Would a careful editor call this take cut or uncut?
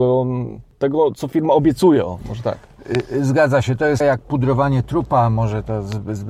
cut